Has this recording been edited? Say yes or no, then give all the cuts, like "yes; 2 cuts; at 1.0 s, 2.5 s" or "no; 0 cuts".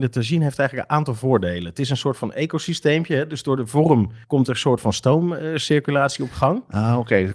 yes; 1 cut; at 4.2 s